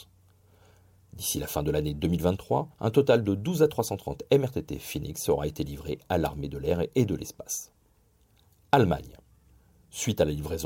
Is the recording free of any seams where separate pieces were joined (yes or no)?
no